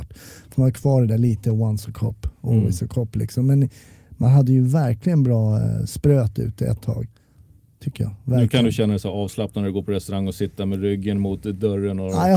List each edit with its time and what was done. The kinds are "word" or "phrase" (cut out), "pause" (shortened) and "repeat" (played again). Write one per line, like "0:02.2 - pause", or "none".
none